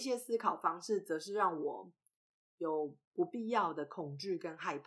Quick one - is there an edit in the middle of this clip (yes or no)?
no